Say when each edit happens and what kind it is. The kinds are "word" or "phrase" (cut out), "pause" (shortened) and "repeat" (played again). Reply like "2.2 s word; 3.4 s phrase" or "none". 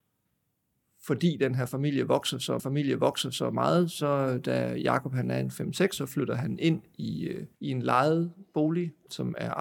2.6 s repeat; 6.0 s word; 7.5 s pause